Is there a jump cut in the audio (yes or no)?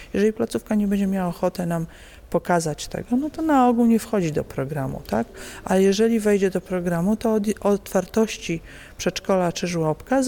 no